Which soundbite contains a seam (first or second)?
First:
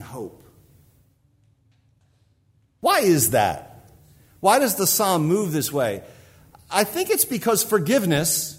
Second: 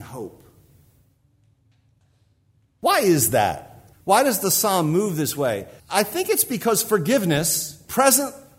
second